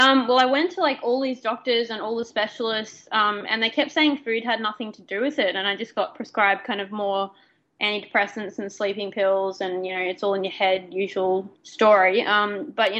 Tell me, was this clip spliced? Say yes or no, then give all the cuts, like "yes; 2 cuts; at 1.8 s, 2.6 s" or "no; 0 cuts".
yes; 1 cut; at 11.5 s